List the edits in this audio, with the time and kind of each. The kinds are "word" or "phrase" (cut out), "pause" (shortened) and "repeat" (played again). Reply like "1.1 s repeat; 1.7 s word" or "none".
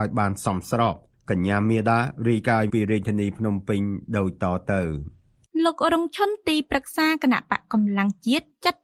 2.7 s word